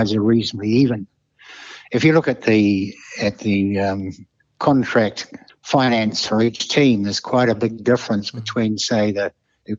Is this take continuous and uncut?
no; 1 cut; at 5.5 s

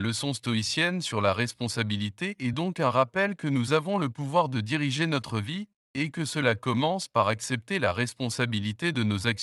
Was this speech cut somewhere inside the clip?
no; 0 cuts

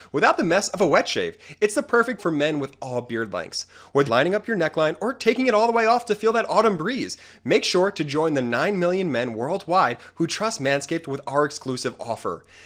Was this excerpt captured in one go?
no; 2 cuts; at 2.2 s, 4.1 s

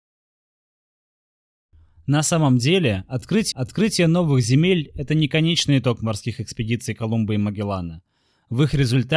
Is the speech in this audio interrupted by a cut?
yes; 1 cut; at 3.5 s

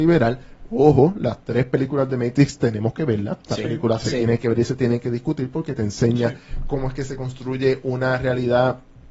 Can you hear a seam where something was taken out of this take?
no; 0 cuts

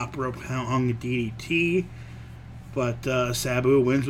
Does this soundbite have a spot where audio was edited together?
no; 0 cuts

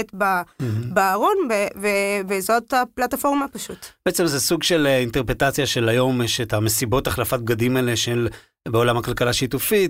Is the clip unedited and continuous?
yes; 0 cuts

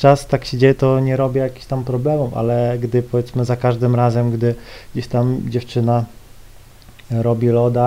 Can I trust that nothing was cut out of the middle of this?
yes; 0 cuts

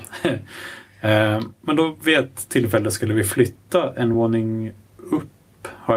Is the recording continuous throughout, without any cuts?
yes; 0 cuts

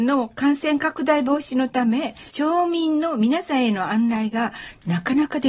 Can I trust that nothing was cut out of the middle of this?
no; 1 cut; at 2.3 s

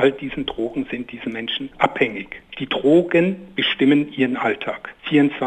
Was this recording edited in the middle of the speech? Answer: no; 0 cuts

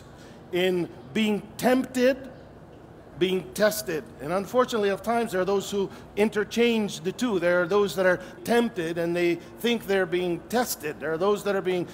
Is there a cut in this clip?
yes; 3 cuts; at 3.1 s, 5.0 s, 8.4 s

